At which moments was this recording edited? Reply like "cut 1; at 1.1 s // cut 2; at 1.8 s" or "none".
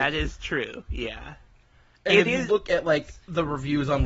none